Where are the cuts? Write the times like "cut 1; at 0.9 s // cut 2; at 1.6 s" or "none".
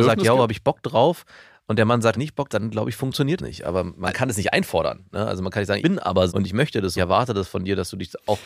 cut 1; at 2.1 s // cut 2; at 2.5 s // cut 3; at 3.4 s // cut 4; at 5.8 s // cut 5; at 6.3 s // cut 6; at 7.0 s